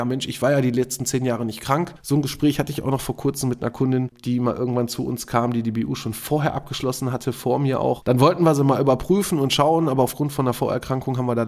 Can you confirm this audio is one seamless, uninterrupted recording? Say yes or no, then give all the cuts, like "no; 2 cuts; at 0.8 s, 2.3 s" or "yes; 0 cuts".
yes; 0 cuts